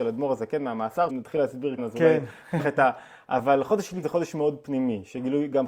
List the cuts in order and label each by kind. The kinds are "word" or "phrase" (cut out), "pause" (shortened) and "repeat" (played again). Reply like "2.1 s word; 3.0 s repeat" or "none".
1.1 s word; 1.8 s word; 2.6 s word; 4.0 s word